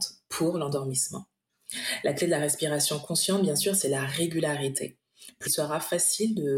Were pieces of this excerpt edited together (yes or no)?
yes